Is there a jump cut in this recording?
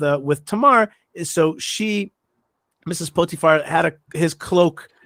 no; 0 cuts

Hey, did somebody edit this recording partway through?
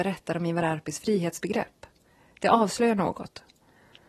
no; 0 cuts

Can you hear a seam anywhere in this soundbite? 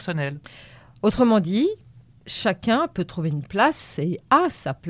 no; 0 cuts

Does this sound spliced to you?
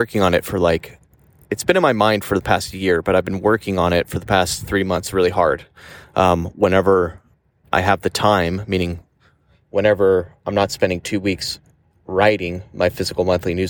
no; 0 cuts

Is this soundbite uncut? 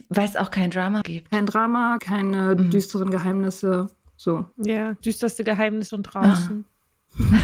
no; 4 cuts; at 1.0 s, 2.0 s, 5.0 s, 5.9 s

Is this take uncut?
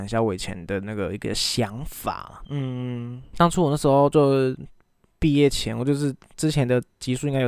yes; 0 cuts

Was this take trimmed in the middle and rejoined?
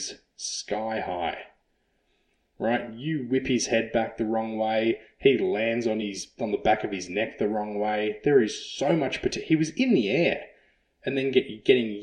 no; 0 cuts

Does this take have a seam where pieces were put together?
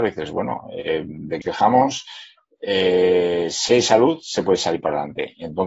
yes; 1 cut; at 1.4 s

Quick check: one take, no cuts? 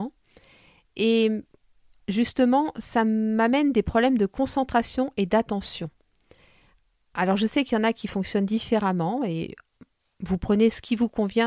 yes; 0 cuts

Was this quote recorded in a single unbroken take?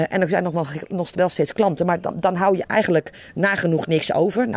yes; 0 cuts

